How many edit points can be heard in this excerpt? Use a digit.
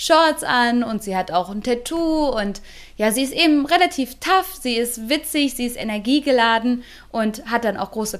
0